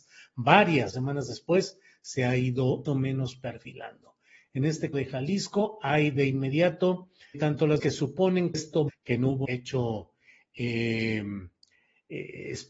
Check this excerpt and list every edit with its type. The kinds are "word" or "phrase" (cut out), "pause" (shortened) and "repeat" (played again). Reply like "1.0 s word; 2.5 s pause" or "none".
0.9 s word; 2.8 s word; 4.9 s word; 7.3 s word; 7.8 s word; 8.5 s word; 8.9 s word; 9.4 s word